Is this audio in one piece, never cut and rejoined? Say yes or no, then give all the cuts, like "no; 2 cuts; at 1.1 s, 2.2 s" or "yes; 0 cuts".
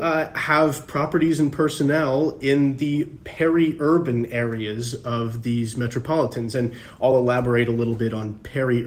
yes; 0 cuts